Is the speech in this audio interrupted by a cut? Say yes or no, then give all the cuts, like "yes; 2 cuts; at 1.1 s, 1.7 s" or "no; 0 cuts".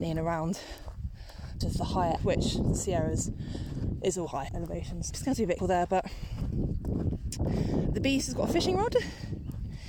yes; 6 cuts; at 1.6 s, 2.2 s, 4.5 s, 5.1 s, 5.6 s, 7.9 s